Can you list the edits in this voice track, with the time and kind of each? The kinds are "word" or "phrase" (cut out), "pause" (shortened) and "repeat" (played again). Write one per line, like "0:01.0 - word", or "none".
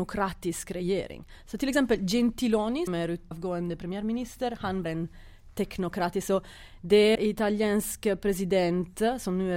0:02.9 - word
0:03.3 - word
0:04.8 - word
0:07.2 - word